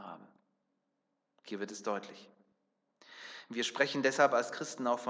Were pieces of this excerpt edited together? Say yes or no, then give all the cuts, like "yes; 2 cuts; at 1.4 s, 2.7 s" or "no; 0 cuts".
no; 0 cuts